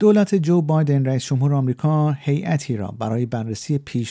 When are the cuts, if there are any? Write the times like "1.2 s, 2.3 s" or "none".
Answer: none